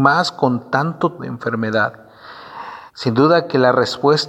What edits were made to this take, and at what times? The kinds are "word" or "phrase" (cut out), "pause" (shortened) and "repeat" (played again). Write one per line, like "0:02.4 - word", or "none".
0:01.2 - word
0:02.9 - pause